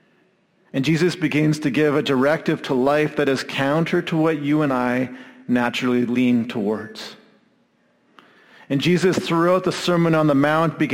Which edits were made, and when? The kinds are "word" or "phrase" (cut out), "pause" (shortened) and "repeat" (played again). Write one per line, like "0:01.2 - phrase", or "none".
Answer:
none